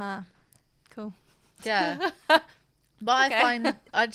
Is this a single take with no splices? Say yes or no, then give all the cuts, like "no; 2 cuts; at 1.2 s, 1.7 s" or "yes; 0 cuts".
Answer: yes; 0 cuts